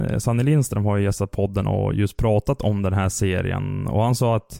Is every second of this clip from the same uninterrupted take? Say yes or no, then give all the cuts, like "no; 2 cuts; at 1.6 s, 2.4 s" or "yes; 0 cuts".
yes; 0 cuts